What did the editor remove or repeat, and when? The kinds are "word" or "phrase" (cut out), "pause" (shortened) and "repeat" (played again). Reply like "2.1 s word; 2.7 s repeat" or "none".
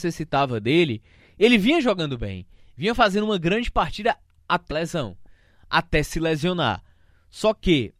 4.7 s word